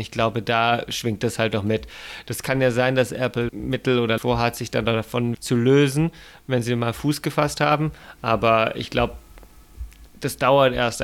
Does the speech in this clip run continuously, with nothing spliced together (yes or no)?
no